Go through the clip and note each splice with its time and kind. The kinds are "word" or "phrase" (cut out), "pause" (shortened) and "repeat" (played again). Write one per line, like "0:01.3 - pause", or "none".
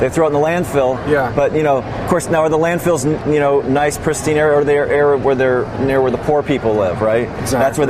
0:03.6 - word